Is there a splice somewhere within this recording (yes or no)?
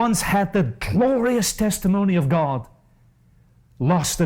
no